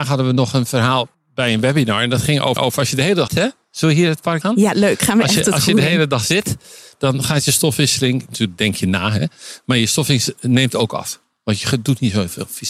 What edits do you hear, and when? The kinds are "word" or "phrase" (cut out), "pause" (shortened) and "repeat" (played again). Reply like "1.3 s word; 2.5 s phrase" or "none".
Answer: 1.1 s pause; 2.6 s repeat; 3.3 s word; 4.4 s word